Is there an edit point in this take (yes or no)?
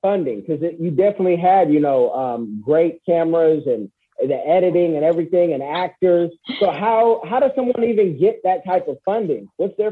no